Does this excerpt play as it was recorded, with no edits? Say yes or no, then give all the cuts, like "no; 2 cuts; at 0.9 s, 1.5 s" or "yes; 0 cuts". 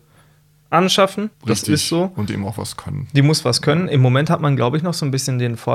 no; 2 cuts; at 1.3 s, 2.3 s